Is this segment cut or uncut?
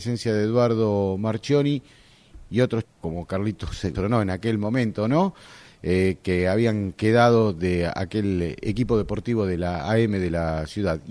cut